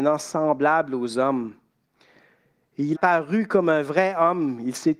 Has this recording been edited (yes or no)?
yes